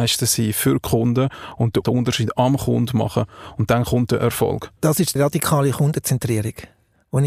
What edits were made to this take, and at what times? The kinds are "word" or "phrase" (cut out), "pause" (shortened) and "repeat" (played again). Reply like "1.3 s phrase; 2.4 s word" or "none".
1.8 s phrase; 4.8 s pause; 5.2 s word